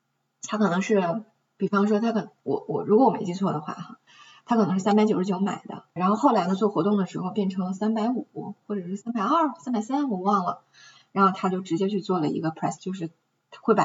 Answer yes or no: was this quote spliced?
yes